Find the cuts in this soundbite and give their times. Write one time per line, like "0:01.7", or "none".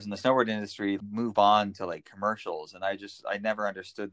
0:01.0